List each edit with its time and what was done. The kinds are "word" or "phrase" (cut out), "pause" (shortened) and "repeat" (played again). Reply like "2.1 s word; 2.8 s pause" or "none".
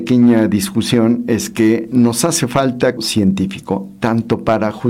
3.0 s word